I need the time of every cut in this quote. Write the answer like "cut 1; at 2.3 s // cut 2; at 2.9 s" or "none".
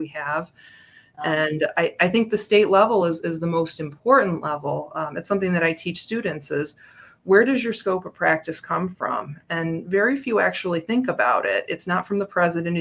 none